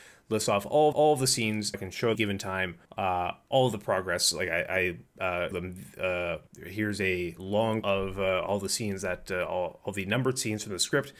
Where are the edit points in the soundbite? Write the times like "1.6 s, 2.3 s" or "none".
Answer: 0.9 s, 1.7 s, 2.1 s, 2.8 s, 5.1 s, 5.5 s, 6.5 s, 7.8 s